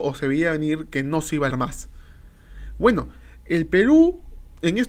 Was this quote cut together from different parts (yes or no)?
yes